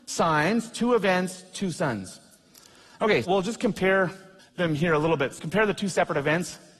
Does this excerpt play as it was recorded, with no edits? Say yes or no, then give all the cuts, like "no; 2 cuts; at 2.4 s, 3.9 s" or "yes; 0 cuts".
no; 3 cuts; at 3.2 s, 4.4 s, 5.4 s